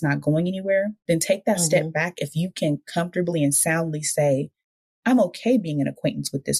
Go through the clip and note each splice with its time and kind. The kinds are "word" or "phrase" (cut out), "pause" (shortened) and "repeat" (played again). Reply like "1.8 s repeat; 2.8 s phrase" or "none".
none